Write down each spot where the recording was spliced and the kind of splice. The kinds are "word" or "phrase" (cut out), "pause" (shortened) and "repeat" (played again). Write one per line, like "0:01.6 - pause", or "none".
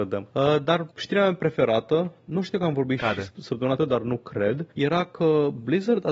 0:00.9 - pause
0:03.8 - word
0:04.7 - pause